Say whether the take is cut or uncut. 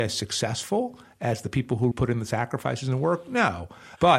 cut